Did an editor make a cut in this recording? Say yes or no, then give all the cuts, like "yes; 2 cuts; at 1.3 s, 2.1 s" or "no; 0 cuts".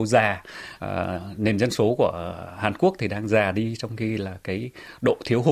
no; 0 cuts